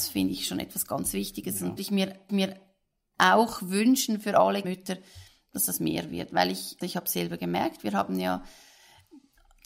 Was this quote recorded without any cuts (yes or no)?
no